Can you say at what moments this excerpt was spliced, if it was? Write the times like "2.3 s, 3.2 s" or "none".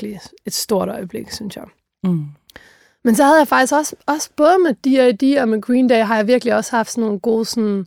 none